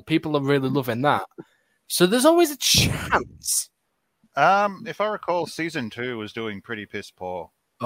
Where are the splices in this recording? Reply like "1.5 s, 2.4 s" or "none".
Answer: none